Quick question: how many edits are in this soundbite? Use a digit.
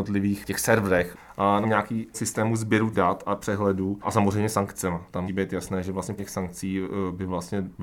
6